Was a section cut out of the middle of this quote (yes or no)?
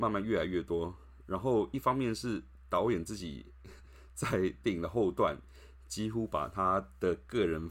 yes